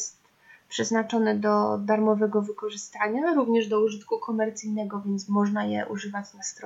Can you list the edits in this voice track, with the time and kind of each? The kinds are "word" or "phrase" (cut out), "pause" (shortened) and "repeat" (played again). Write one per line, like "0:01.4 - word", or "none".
none

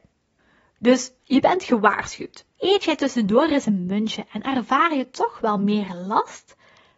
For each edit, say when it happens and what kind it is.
0:02.5 - pause

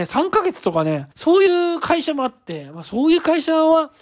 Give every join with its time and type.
0:01.1 - pause

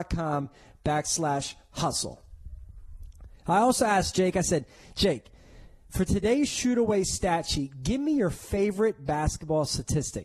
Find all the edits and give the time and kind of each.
none

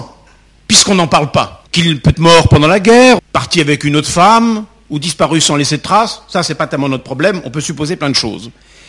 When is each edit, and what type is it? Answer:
0:01.7 - pause
0:02.1 - word
0:03.2 - word

